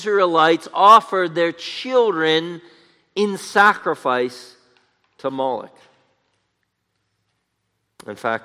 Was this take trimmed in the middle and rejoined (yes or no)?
no